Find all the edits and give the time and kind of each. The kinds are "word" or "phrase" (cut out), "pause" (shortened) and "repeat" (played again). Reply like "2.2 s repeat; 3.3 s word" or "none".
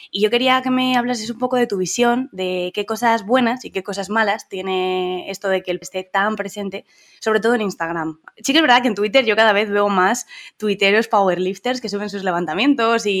5.8 s word